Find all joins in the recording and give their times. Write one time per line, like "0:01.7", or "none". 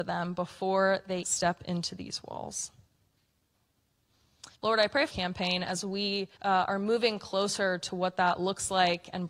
0:01.2
0:04.5
0:05.1
0:06.4